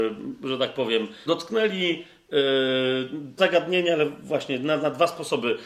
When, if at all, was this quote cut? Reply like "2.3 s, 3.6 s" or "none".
1.3 s, 3.4 s